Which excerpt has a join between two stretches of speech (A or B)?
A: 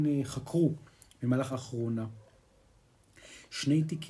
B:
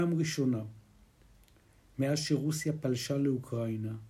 A